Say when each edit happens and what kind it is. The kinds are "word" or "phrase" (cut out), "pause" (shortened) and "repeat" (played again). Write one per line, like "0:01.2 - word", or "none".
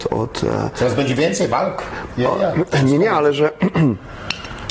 none